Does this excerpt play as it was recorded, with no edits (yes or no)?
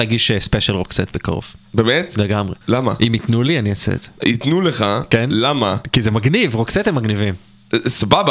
no